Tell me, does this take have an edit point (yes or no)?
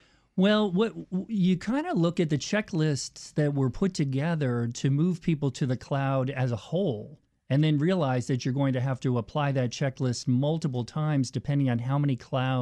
no